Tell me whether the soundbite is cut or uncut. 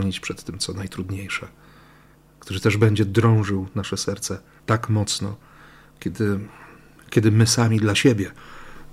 uncut